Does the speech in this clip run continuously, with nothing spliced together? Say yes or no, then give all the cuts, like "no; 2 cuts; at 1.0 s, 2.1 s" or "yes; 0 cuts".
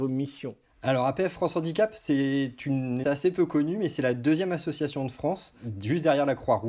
no; 1 cut; at 3.0 s